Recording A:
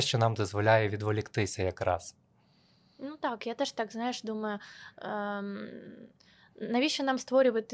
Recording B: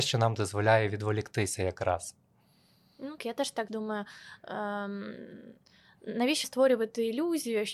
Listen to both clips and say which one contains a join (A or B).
B